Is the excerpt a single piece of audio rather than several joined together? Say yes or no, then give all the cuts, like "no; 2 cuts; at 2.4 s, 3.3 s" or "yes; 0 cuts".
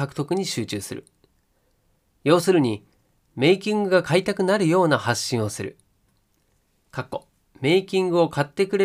no; 1 cut; at 7.3 s